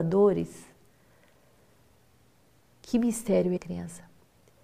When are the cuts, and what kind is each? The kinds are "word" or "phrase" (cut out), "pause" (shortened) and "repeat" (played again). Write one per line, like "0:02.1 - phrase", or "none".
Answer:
0:03.6 - phrase